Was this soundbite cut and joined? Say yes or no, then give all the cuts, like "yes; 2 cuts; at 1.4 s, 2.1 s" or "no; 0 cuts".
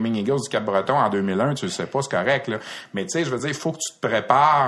no; 0 cuts